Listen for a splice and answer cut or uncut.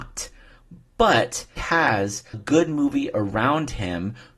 cut